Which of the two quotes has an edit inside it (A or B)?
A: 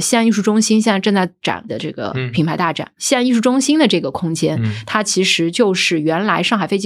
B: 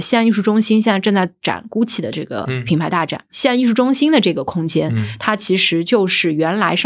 A